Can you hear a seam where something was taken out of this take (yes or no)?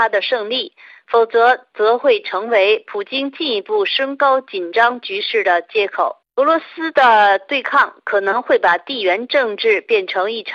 yes